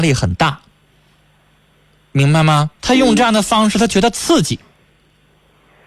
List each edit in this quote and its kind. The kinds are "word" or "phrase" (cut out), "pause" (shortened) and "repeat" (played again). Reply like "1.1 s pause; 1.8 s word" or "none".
2.7 s pause